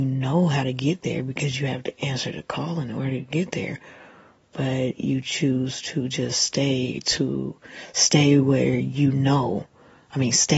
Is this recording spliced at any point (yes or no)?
no